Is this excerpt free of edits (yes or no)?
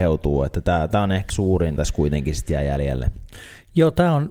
no